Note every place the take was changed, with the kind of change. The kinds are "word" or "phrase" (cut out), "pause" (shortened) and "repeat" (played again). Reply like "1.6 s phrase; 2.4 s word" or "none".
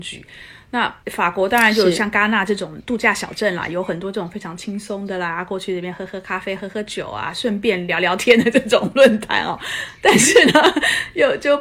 1.0 s pause